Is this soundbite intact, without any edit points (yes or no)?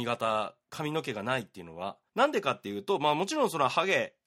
no